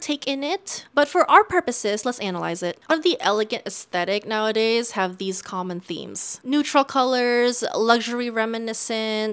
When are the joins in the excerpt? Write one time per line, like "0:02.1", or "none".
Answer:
0:02.9